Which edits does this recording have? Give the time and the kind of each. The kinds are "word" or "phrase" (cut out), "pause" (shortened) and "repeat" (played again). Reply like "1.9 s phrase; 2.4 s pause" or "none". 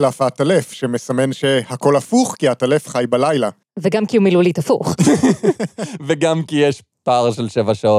none